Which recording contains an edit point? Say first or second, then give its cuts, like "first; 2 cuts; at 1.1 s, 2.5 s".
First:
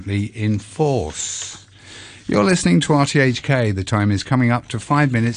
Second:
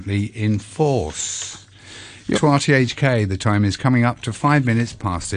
second; 1 cut; at 2.3 s